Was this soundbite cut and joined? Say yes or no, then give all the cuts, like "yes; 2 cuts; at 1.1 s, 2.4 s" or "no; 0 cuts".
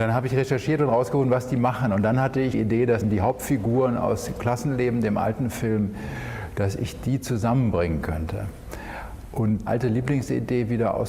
yes; 3 cuts; at 2.5 s, 3.0 s, 9.7 s